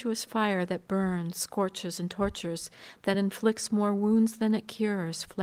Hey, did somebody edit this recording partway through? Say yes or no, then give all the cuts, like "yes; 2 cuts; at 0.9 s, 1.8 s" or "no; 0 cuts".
no; 0 cuts